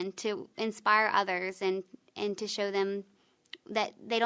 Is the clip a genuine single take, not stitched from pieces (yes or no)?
yes